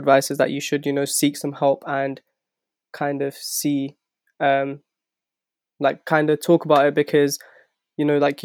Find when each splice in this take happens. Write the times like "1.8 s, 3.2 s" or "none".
none